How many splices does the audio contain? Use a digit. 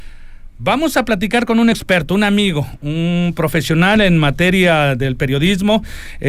0